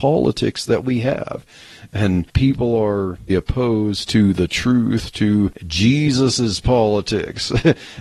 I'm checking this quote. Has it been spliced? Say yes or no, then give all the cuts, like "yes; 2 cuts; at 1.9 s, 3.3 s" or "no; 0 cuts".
yes; 1 cut; at 3.3 s